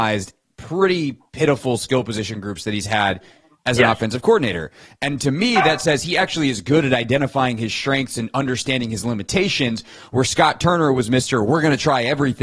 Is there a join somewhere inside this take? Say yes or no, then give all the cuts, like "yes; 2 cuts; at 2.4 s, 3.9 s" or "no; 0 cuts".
no; 0 cuts